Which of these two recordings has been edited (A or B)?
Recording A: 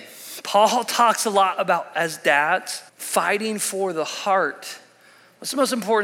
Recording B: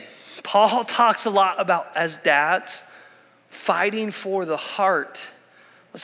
A